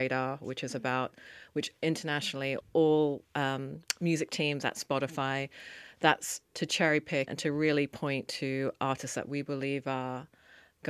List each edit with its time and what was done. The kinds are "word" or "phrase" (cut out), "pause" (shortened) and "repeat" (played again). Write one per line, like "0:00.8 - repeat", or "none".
0:02.6 - word
0:07.3 - word